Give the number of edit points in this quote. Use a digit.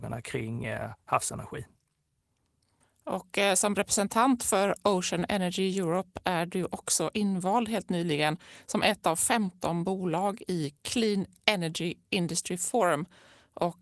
0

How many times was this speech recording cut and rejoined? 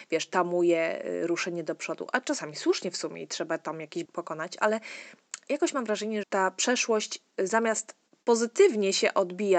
2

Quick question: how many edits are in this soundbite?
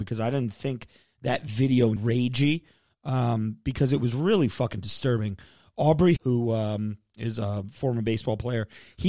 2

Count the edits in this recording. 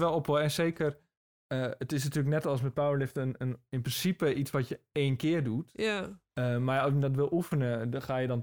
0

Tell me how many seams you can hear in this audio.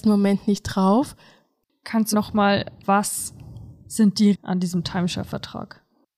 3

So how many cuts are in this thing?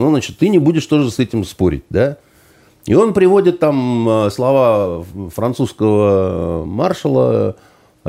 0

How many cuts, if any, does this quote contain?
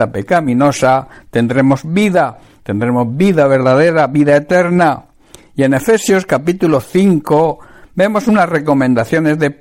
0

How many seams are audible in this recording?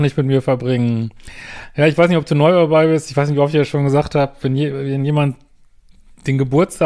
0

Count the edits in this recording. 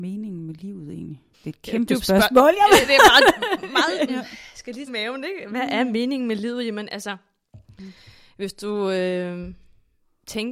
3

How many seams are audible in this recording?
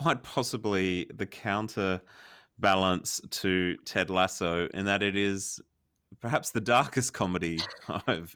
0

